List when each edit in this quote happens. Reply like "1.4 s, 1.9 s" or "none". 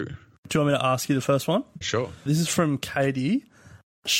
1.8 s, 2.3 s